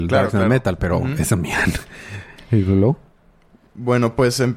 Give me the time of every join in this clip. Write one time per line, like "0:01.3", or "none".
none

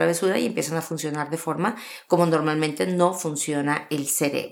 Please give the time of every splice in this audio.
none

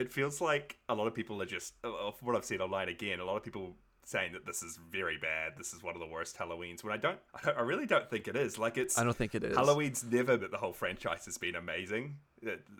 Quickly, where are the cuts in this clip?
0:01.8
0:04.0
0:07.3
0:10.4

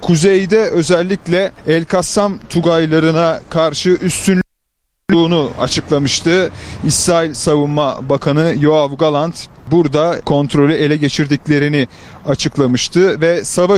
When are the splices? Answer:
none

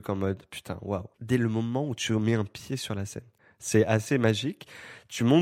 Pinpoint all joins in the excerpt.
0:01.1
0:03.4

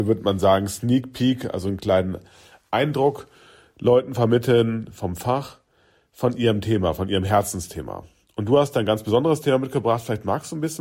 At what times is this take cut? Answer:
none

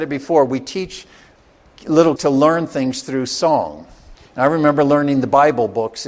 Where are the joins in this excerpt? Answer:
0:02.2
0:04.1

